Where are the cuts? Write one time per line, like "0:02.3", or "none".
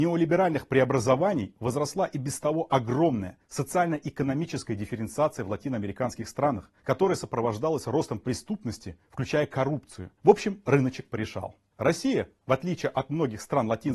0:06.8
0:10.2

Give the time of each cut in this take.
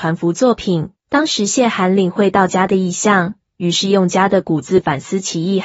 0:01.0

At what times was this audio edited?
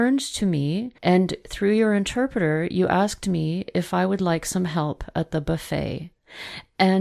0:01.0

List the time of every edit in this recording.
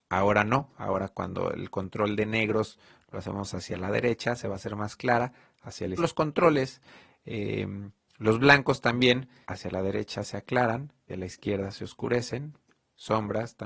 0:06.0
0:09.4
0:11.1

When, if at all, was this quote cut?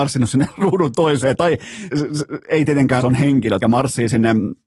0:01.9
0:03.0
0:03.6

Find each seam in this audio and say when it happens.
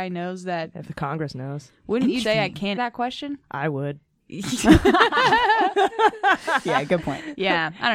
0:02.2
0:02.8

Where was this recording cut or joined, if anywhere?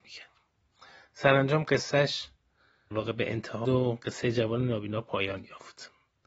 0:02.9
0:03.6

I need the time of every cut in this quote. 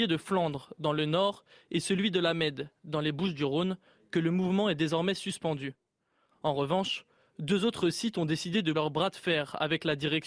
0:08.7

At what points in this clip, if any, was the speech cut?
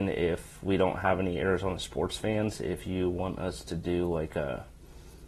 none

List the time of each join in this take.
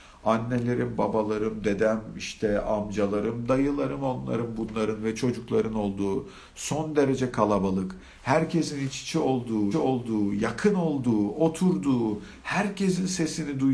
0:09.7

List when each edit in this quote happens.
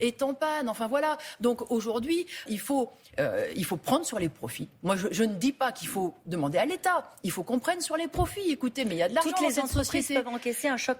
0:02.5

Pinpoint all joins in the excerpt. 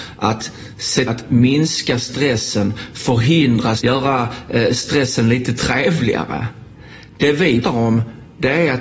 0:01.1
0:03.8
0:07.6

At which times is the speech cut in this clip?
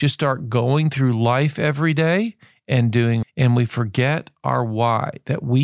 0:03.2

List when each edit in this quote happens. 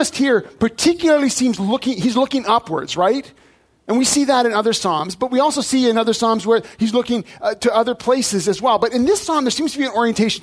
none

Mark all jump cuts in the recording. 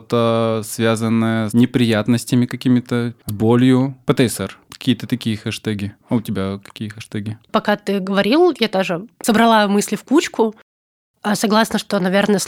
0:01.5
0:03.2
0:06.0

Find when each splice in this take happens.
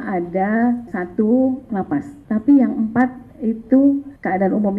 0:01.7

